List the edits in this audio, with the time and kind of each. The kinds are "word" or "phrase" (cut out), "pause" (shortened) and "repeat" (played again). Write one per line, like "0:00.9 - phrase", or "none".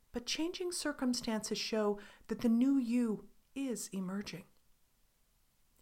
none